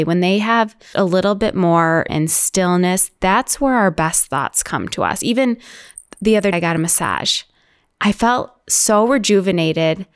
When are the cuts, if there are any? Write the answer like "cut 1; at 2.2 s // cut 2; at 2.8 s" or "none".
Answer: cut 1; at 0.9 s // cut 2; at 2.1 s // cut 3; at 6.5 s // cut 4; at 7.9 s